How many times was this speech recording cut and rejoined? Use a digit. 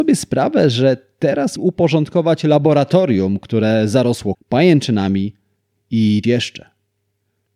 3